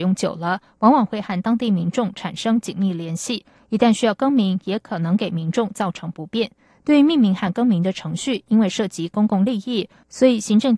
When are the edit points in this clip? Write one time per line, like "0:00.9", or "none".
none